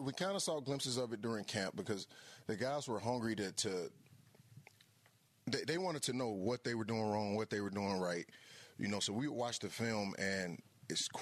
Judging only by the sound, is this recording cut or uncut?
uncut